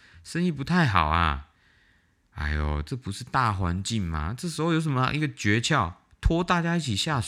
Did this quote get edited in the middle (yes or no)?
no